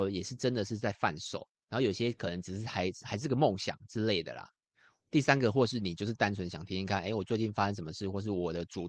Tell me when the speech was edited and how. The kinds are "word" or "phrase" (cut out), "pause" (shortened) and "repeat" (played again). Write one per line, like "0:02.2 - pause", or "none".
0:04.7 - pause